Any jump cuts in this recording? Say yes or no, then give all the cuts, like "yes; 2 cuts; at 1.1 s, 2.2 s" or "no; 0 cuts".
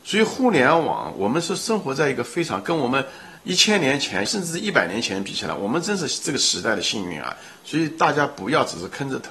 yes; 2 cuts; at 3.4 s, 4.3 s